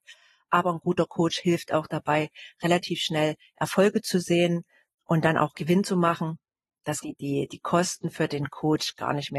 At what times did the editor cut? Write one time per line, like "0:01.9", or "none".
0:05.0
0:07.0